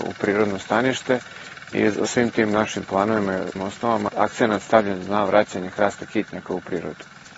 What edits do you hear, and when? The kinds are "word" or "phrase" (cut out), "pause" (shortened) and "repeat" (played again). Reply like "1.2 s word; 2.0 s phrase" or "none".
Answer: 2.0 s word; 3.5 s word; 4.1 s word